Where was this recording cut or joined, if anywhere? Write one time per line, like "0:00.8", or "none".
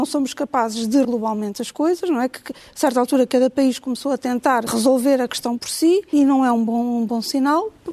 0:01.0
0:04.7
0:06.1